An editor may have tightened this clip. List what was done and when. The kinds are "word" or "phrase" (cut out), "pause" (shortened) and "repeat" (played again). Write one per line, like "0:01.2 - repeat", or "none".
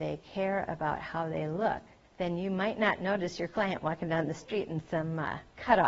0:02.0 - pause